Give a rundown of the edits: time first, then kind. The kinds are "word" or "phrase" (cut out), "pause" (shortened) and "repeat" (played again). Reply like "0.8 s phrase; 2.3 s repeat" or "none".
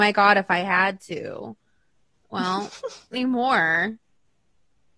3.1 s word